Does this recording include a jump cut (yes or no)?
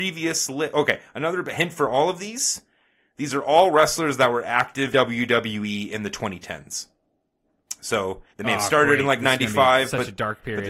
yes